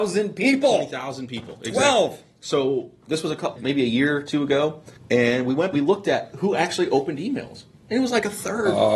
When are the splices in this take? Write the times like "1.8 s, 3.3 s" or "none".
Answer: 3.6 s, 5.0 s, 5.7 s